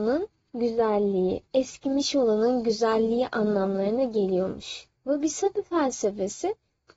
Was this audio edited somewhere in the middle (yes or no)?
yes